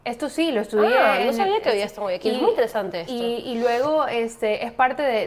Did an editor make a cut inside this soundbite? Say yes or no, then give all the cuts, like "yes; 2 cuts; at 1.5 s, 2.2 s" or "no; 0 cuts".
no; 0 cuts